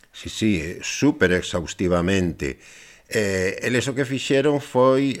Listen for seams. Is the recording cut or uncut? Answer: uncut